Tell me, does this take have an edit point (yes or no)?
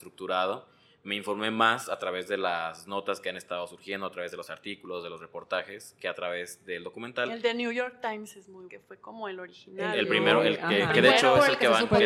yes